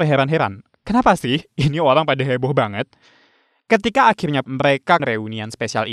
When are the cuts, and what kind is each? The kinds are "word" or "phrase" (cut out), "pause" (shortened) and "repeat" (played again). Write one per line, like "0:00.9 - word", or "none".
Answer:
0:04.4 - word
0:05.0 - word